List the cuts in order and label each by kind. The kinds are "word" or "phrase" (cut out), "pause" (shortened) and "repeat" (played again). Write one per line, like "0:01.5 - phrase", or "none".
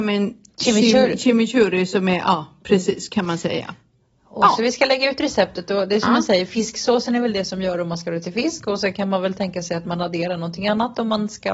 none